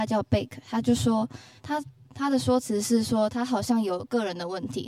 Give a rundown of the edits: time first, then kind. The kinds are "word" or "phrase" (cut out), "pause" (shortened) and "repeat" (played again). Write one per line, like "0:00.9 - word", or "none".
0:01.6 - pause

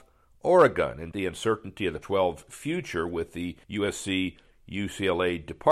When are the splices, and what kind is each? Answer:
0:01.1 - word
0:02.0 - word
0:03.6 - pause

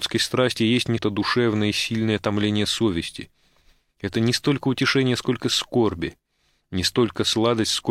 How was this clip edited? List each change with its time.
0:01.0 - phrase

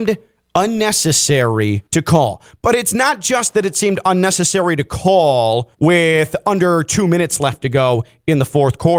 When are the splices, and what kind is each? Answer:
0:01.9 - pause
0:05.7 - pause

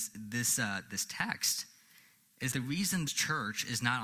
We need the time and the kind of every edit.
0:02.5 - word
0:03.1 - word

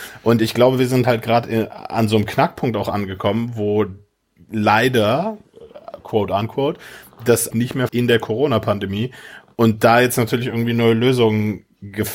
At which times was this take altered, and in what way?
0:04.4 - pause
0:07.5 - phrase
0:07.9 - word

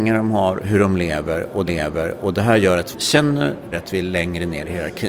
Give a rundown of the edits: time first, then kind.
0:01.7 - repeat
0:02.9 - word
0:03.7 - word

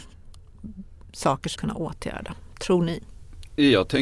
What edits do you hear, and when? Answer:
0:01.6 - phrase

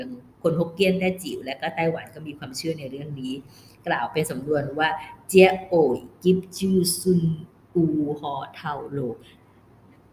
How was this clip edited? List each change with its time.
none

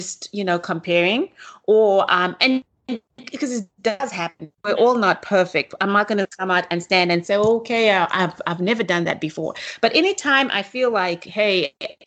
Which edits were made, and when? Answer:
0:03.8 - pause
0:04.6 - pause

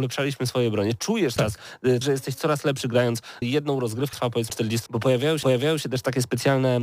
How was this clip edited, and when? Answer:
0:01.4 - word
0:02.0 - phrase
0:03.4 - word
0:04.1 - word
0:04.5 - word
0:04.9 - word
0:05.4 - repeat

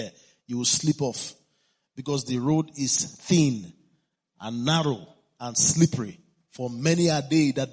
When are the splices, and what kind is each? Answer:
none

